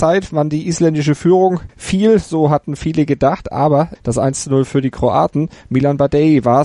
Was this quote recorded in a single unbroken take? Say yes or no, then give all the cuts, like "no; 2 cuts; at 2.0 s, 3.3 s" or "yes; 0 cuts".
no; 2 cuts; at 1.7 s, 3.9 s